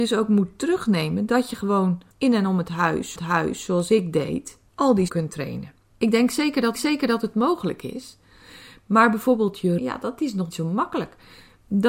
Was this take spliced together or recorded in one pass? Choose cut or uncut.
cut